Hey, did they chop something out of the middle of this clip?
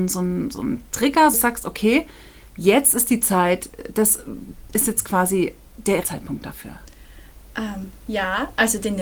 yes; 3 cuts; at 1.3 s, 2.5 s, 6.0 s

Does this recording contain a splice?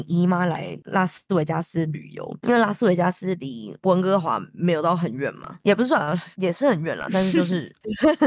yes; 1 cut; at 5.6 s

